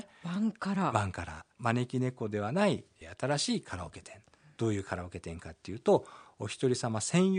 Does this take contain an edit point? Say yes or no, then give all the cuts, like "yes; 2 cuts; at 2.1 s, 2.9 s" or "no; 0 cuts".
yes; 1 cut; at 1.5 s